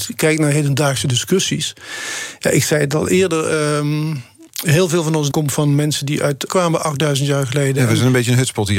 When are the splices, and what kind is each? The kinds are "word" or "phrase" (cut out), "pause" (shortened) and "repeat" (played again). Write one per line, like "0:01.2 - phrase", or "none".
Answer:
0:05.3 - word
0:06.5 - word